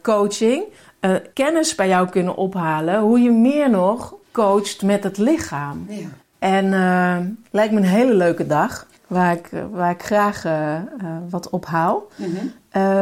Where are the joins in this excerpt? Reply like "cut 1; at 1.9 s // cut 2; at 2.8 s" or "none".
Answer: cut 1; at 1.3 s // cut 2; at 4.2 s // cut 3; at 6.2 s // cut 4; at 9.0 s